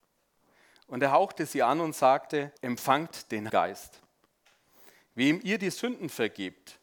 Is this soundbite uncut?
no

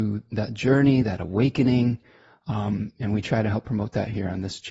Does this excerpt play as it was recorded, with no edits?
yes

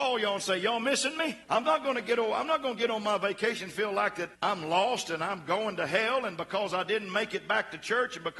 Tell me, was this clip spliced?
yes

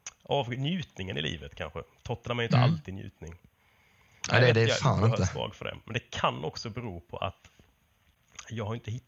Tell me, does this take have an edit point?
no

